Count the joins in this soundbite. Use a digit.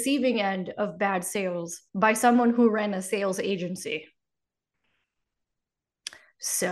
1